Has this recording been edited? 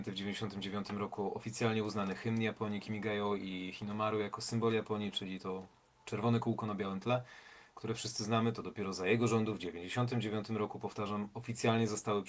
no; 0 cuts

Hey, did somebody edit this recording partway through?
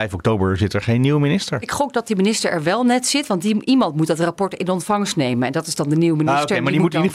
no; 0 cuts

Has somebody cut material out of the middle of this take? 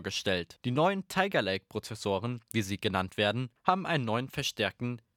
no; 0 cuts

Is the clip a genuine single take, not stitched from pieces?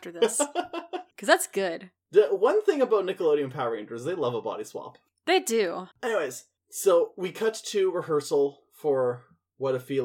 no; 3 cuts; at 1.1 s, 5.1 s, 5.9 s

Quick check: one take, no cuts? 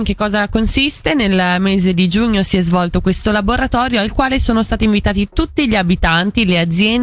yes; 0 cuts

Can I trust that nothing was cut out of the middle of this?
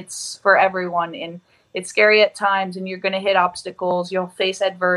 yes; 0 cuts

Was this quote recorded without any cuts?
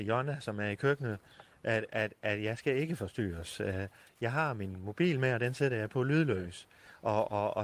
yes; 0 cuts

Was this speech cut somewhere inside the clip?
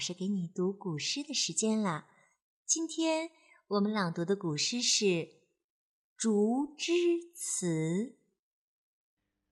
no; 0 cuts

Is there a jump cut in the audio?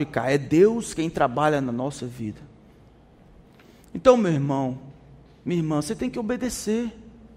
no; 0 cuts

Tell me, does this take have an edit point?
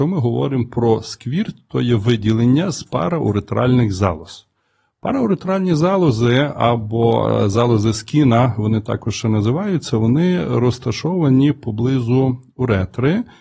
no; 0 cuts

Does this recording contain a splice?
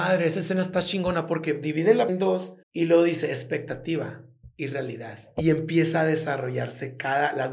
yes; 2 cuts; at 2.1 s, 2.6 s

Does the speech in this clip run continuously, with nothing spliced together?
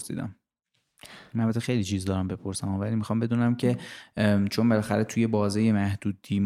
yes; 0 cuts

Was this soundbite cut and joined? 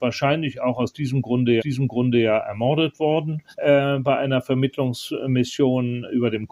yes; 2 cuts; at 1.6 s, 3.5 s

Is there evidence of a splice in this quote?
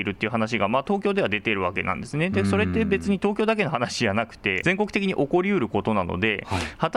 yes; 1 cut; at 4.6 s

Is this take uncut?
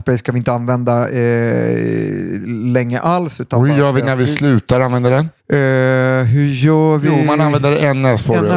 no; 1 cut; at 5.4 s

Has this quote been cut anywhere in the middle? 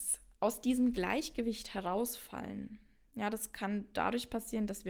no; 0 cuts

